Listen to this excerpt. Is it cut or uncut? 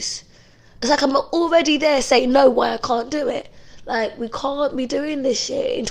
uncut